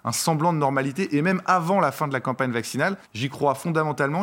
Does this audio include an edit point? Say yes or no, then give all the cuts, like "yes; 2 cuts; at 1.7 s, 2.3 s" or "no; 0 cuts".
yes; 1 cut; at 3.0 s